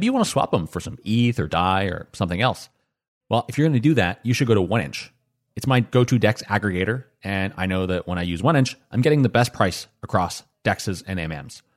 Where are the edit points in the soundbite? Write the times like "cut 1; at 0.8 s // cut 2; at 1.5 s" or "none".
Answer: none